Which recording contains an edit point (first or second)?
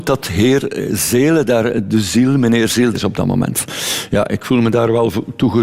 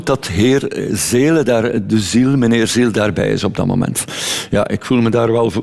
first